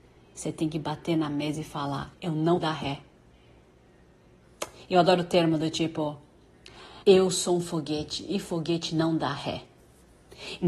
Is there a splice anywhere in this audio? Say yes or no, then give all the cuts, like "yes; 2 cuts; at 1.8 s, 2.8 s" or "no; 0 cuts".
yes; 3 cuts; at 2.1 s, 2.6 s, 7.0 s